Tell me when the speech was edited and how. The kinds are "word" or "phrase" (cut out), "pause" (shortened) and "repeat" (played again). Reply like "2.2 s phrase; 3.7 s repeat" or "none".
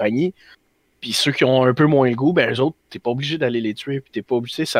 none